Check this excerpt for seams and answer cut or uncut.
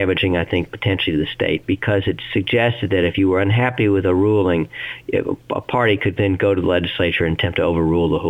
uncut